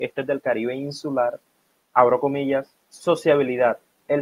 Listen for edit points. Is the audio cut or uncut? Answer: cut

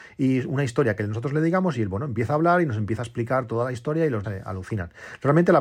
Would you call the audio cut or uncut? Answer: cut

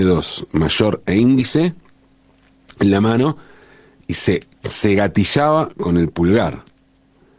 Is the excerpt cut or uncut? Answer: cut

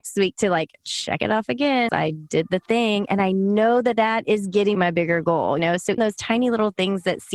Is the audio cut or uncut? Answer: cut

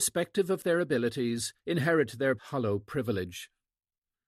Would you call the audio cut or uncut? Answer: cut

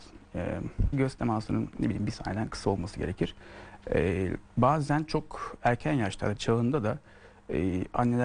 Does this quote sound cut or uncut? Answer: cut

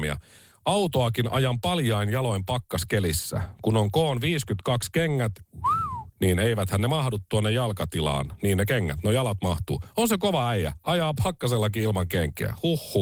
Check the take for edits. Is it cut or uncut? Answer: cut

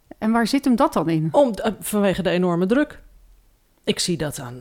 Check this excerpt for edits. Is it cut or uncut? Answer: uncut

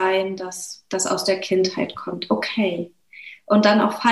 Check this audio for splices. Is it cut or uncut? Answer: uncut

